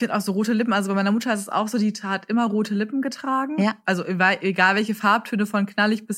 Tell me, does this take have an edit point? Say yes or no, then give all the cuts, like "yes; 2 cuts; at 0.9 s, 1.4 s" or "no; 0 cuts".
no; 0 cuts